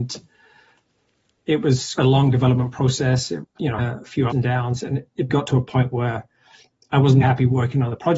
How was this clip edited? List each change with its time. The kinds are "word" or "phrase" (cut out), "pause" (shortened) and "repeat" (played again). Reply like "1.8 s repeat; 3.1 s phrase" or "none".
2.0 s word; 3.4 s word; 3.8 s word; 4.3 s word; 5.3 s word; 7.2 s word